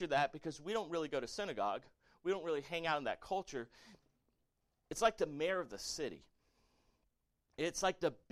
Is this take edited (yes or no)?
no